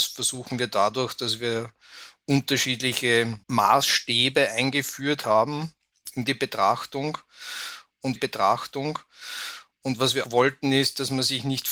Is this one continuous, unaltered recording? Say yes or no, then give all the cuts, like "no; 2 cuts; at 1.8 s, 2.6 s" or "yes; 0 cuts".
no; 3 cuts; at 3.4 s, 8.2 s, 10.2 s